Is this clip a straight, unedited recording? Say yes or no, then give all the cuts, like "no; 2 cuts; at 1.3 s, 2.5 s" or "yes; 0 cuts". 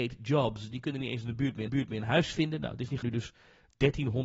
no; 2 cuts; at 1.7 s, 3.0 s